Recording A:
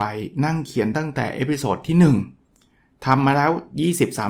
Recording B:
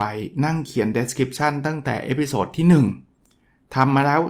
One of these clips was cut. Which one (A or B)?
A